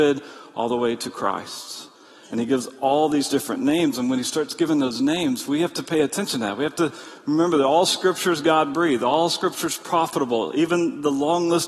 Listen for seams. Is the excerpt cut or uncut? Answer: uncut